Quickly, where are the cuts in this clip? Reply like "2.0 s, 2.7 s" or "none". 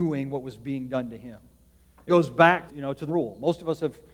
2.1 s, 2.7 s, 3.1 s